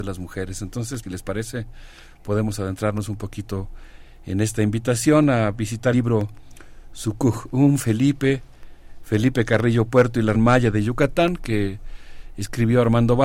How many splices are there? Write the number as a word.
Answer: three